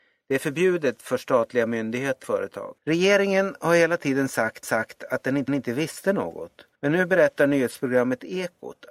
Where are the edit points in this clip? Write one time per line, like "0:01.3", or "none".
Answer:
0:02.2
0:02.8
0:04.6
0:05.5
0:06.7